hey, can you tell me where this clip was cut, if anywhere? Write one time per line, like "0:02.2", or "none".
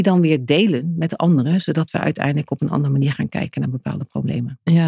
none